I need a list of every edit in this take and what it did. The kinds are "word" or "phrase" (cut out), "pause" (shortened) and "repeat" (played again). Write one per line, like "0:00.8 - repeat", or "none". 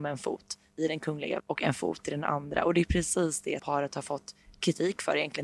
0:01.4 - word
0:03.6 - word